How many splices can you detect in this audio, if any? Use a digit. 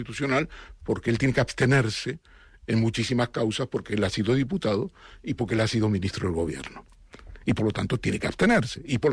0